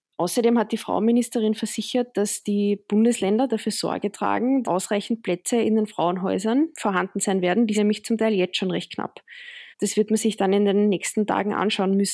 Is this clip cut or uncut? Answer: cut